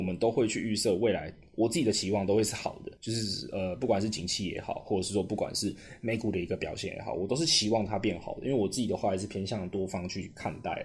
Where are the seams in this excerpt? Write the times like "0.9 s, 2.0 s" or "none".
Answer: 3.0 s

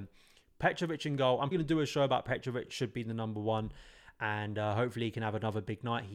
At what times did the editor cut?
1.5 s, 2.7 s

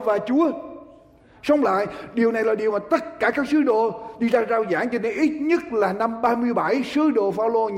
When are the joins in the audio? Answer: none

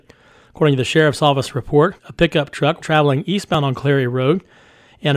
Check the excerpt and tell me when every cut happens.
2.0 s, 2.8 s

